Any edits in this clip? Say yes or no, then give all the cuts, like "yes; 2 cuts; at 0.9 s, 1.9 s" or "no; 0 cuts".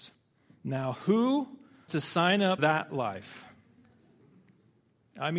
yes; 2 cuts; at 1.9 s, 2.6 s